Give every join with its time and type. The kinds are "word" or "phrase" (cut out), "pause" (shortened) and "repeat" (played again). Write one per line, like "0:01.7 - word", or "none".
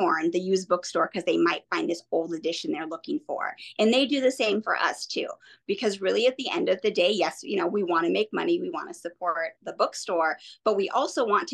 none